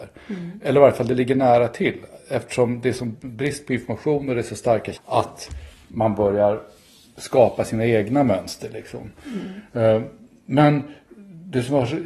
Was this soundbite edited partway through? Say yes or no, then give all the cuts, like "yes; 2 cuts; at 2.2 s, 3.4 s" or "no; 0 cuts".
yes; 1 cut; at 4.9 s